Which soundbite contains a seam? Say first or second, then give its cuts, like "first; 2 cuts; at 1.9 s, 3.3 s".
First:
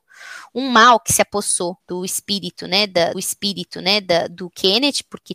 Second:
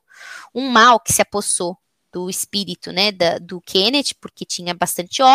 first; 2 cuts; at 1.8 s, 3.1 s